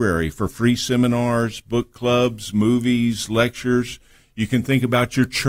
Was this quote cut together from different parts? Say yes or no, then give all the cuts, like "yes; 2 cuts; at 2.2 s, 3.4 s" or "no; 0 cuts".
no; 0 cuts